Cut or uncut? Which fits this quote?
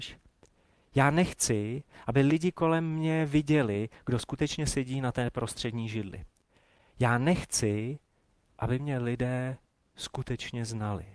uncut